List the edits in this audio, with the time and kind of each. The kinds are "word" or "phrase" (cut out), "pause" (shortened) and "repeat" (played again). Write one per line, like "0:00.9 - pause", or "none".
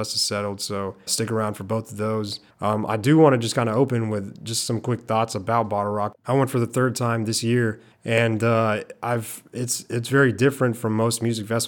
0:01.1 - word
0:02.5 - pause
0:06.2 - pause
0:07.9 - pause